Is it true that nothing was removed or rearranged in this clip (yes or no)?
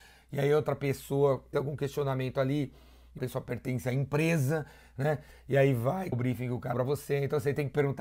no